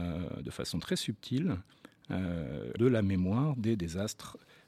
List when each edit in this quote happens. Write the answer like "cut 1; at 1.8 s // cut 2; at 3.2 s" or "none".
cut 1; at 2.8 s